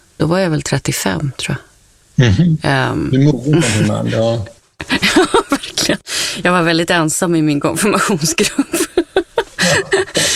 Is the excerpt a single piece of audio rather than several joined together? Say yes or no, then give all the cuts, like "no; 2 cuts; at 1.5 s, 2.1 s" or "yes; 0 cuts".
no; 1 cut; at 4.6 s